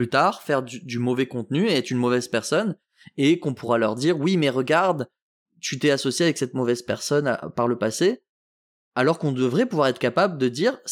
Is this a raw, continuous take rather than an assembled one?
yes; 0 cuts

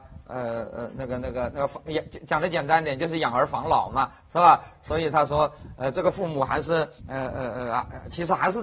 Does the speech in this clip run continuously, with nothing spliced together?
no; 1 cut; at 7.0 s

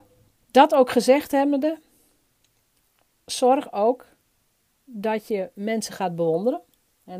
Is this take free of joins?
yes; 0 cuts

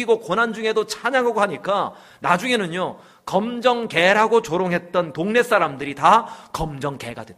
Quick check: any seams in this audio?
no; 0 cuts

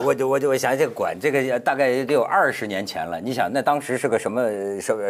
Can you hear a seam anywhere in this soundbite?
no; 0 cuts

